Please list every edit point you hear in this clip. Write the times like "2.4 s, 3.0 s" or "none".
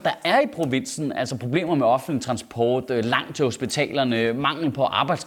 none